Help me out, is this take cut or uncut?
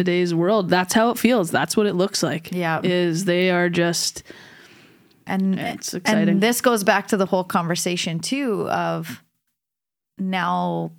uncut